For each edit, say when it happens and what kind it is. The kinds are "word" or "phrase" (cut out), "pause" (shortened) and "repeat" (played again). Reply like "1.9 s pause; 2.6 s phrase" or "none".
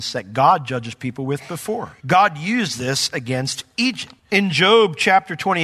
2.0 s pause